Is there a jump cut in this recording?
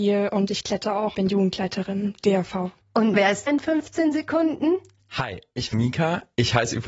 yes; 4 cuts; at 1.1 s, 3.1 s, 3.5 s, 5.7 s

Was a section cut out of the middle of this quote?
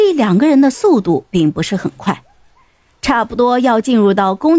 no; 0 cuts

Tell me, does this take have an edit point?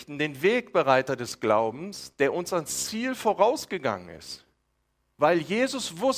no; 0 cuts

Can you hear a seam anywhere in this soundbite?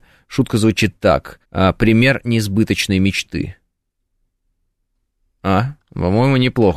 yes; 1 cut; at 1.4 s

